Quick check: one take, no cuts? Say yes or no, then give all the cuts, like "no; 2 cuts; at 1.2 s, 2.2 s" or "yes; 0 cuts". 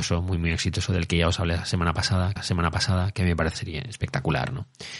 no; 2 cuts; at 2.4 s, 3.5 s